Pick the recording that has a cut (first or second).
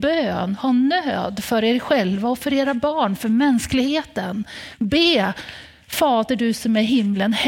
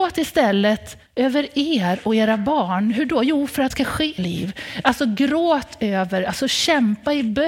second